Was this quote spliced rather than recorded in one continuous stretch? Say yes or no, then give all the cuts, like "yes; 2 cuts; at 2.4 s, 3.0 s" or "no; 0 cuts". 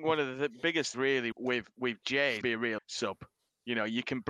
yes; 4 cuts; at 0.9 s, 1.3 s, 2.4 s, 2.8 s